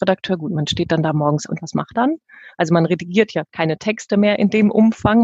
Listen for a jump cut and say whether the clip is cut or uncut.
cut